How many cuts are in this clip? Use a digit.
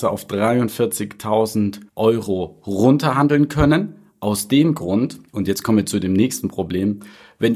2